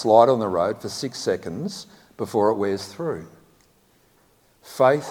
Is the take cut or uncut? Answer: uncut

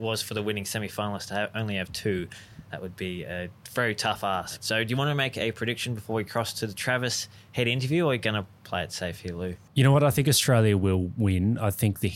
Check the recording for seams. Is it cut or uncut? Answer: cut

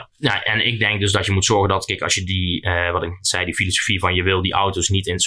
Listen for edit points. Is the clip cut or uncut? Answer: uncut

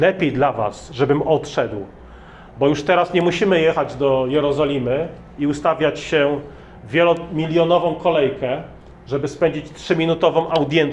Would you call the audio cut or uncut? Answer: uncut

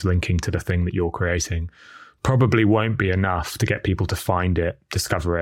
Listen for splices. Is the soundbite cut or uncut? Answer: uncut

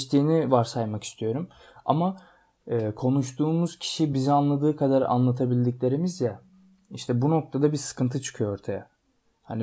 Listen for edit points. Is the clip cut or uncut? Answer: uncut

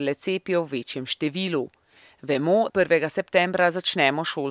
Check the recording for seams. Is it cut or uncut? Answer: cut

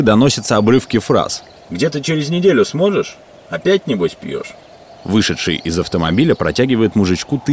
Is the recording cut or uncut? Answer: uncut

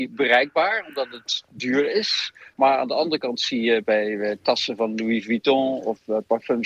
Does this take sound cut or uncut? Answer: uncut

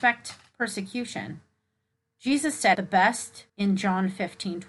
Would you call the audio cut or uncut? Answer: cut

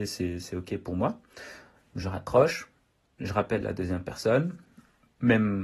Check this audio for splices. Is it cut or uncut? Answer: uncut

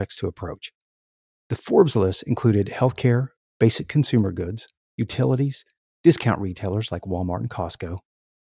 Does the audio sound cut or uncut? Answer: uncut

